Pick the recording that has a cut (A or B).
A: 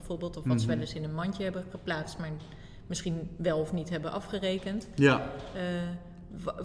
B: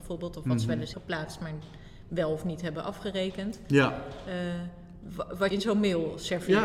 B